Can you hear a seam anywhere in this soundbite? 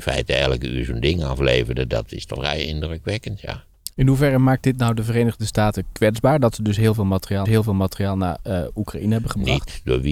yes; 2 cuts; at 2.4 s, 7.5 s

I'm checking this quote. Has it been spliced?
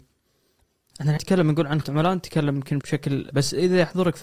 yes; 4 cuts; at 1.2 s, 1.8 s, 2.8 s, 3.3 s

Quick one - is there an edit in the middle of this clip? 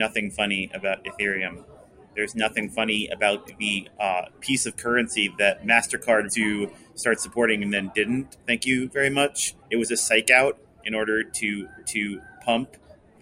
yes; 4 cuts; at 3.9 s, 6.3 s, 9.6 s, 11.8 s

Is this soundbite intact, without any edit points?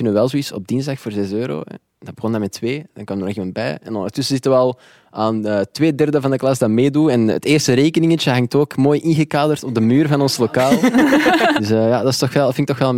yes; 0 cuts

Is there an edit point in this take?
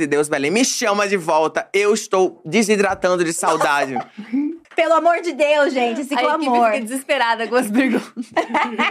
yes; 1 cut; at 4.6 s

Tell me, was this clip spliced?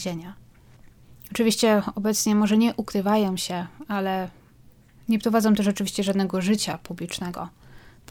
no; 0 cuts

